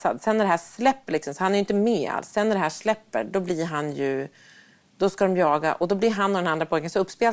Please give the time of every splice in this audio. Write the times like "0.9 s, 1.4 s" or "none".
none